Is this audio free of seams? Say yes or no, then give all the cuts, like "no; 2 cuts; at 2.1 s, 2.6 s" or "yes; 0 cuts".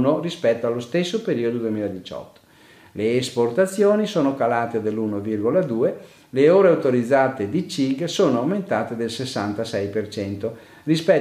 yes; 0 cuts